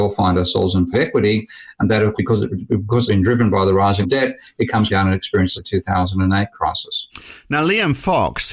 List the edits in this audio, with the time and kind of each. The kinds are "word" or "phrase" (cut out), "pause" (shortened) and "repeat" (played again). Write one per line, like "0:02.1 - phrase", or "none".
0:00.9 - word
0:02.2 - word
0:03.1 - word
0:04.0 - word
0:04.9 - word
0:05.6 - word